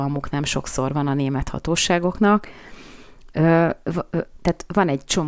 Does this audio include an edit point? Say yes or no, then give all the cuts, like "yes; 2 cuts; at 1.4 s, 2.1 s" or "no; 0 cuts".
no; 0 cuts